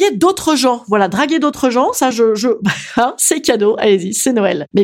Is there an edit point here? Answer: no; 0 cuts

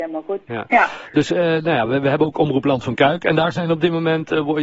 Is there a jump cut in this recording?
no; 0 cuts

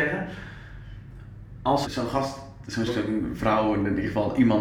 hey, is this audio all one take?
no; 2 cuts; at 1.8 s, 2.9 s

